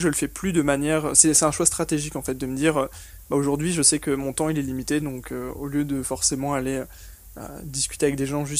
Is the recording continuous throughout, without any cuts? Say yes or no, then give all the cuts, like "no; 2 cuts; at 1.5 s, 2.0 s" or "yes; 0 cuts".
yes; 0 cuts